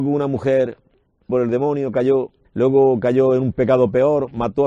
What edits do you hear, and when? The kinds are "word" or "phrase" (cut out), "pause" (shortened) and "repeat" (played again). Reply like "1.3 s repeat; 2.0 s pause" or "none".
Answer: 1.3 s word; 2.4 s pause